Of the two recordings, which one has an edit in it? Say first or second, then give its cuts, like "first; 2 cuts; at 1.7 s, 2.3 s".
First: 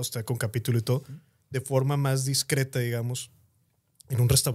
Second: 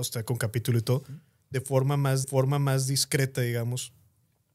second; 1 cut; at 2.2 s